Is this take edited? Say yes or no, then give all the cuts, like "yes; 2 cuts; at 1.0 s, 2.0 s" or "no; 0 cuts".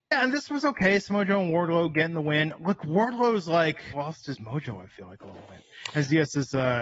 yes; 1 cut; at 3.9 s